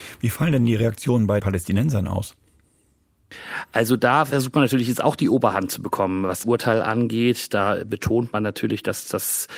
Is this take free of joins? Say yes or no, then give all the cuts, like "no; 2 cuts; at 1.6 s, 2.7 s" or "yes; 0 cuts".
no; 2 cuts; at 1.4 s, 6.4 s